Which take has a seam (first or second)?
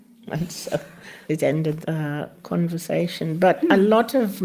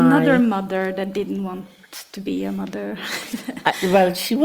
first